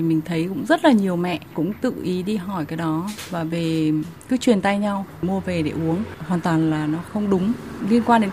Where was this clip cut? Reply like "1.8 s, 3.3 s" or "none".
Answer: none